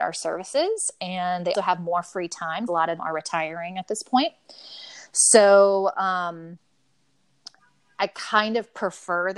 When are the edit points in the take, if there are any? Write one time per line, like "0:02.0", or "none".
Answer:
0:01.5
0:02.7
0:03.0